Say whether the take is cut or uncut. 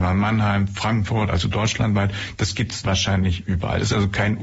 cut